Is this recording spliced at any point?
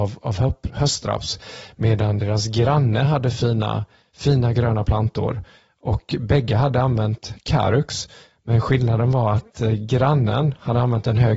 no; 0 cuts

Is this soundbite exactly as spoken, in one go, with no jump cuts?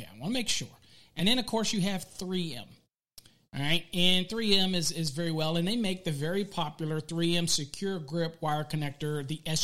yes; 0 cuts

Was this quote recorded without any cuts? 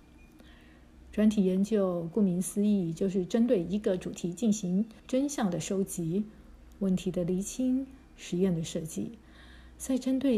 no; 2 cuts; at 5.0 s, 8.0 s

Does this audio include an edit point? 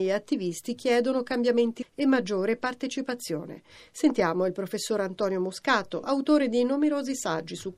yes; 1 cut; at 1.8 s

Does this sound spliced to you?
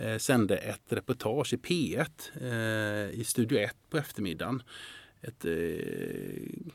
yes; 1 cut; at 5.4 s

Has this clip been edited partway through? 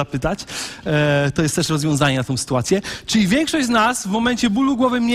no; 0 cuts

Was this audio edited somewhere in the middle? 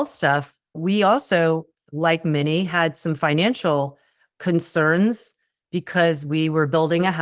no; 0 cuts

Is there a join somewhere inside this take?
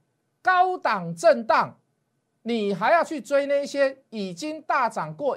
no; 0 cuts

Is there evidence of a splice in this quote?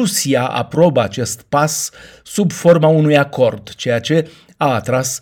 no; 0 cuts

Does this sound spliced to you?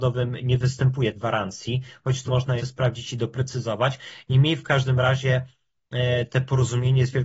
yes; 3 cuts; at 1.1 s, 2.3 s, 2.6 s

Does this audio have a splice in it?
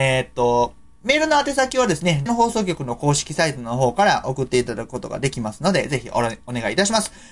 yes; 1 cut; at 2.3 s

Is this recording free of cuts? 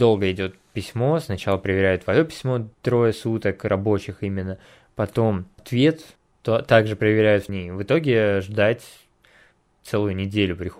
no; 3 cuts; at 2.7 s, 6.2 s, 7.5 s

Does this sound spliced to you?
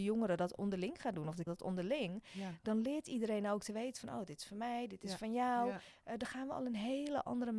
yes; 1 cut; at 1.5 s

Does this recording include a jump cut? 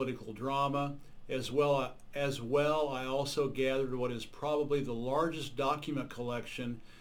no; 0 cuts

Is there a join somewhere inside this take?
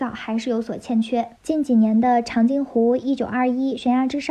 no; 0 cuts

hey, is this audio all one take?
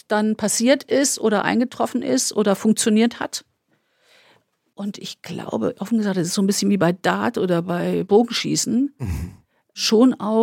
yes; 0 cuts

